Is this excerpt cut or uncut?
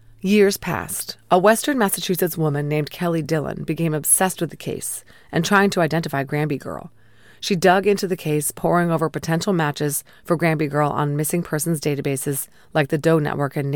uncut